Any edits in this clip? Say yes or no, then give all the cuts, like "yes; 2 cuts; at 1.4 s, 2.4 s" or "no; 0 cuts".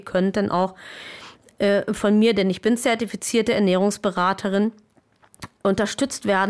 no; 0 cuts